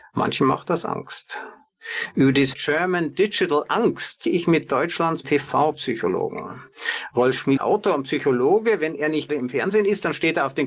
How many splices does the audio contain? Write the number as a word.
five